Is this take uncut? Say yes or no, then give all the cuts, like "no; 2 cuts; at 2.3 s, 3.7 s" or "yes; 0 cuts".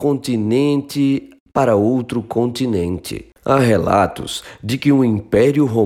yes; 0 cuts